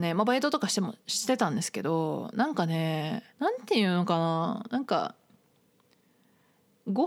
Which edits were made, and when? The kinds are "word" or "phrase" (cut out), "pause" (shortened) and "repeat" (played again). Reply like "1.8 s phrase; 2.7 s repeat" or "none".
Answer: 3.3 s pause